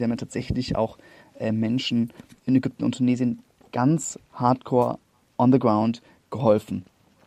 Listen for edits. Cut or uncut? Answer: uncut